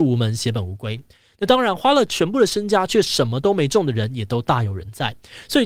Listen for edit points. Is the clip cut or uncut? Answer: uncut